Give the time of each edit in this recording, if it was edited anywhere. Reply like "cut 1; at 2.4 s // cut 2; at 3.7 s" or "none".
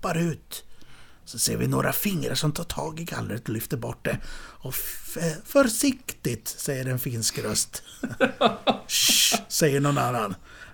none